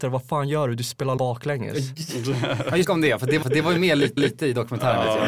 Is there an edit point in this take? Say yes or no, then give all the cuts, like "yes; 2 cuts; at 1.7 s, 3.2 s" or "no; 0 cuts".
yes; 4 cuts; at 1.2 s, 2.8 s, 3.4 s, 4.2 s